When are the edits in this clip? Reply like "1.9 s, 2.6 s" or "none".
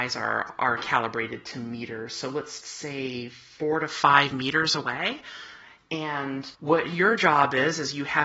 2.6 s, 6.5 s